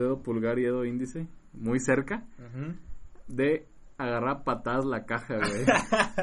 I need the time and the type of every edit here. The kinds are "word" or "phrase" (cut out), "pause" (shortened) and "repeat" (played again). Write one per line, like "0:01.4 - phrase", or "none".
none

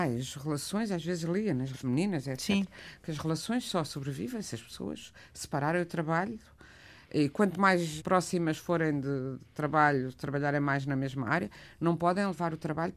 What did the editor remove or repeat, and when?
0:01.7 - word
0:08.0 - word

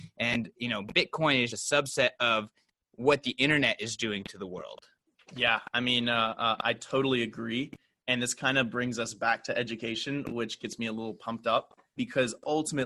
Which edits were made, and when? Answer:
0:01.5 - word
0:12.0 - word

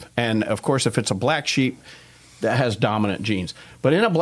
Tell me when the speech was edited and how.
none

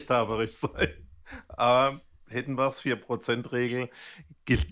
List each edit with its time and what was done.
none

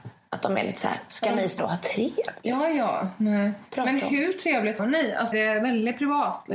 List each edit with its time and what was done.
0:01.1 - word
0:01.6 - word
0:04.8 - word
0:05.3 - word

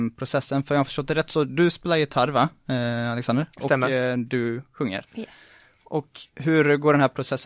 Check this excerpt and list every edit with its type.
none

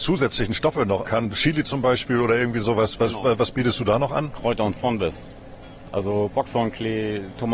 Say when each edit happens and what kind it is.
0:01.0 - word
0:04.7 - word

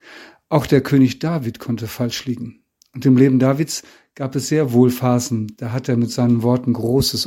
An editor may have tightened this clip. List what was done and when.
none

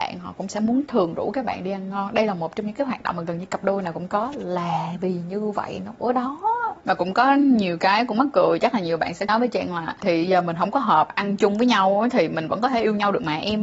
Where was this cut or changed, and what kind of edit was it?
0:06.8 - pause

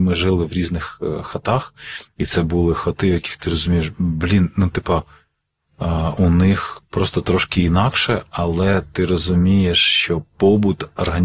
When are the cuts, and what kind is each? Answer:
none

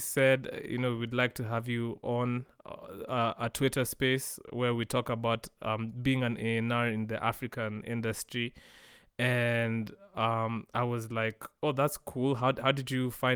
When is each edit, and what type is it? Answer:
none

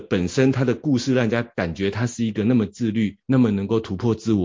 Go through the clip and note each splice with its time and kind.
0:03.2 - pause

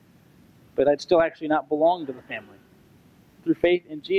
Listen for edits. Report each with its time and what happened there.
none

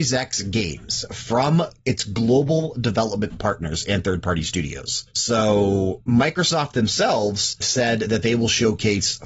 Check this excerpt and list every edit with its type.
0:07.6 - word

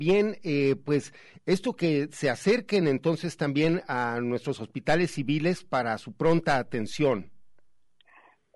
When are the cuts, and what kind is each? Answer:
none

